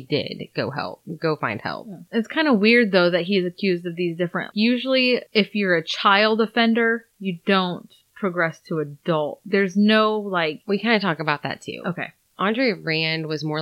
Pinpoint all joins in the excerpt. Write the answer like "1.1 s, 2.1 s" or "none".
4.5 s